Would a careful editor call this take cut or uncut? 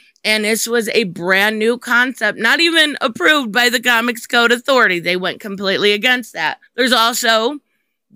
cut